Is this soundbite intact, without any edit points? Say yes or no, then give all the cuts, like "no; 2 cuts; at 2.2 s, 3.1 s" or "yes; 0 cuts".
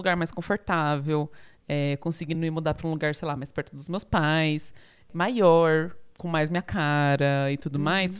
yes; 0 cuts